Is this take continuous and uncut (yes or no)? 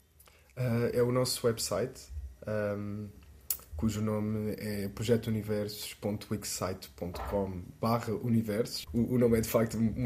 yes